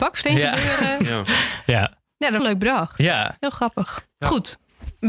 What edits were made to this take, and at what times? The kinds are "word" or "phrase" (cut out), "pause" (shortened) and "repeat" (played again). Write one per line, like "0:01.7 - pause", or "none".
0:02.4 - word